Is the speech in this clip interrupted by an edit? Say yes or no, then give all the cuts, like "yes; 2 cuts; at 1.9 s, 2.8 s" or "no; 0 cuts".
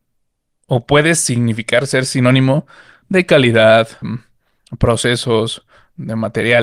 yes; 1 cut; at 4.0 s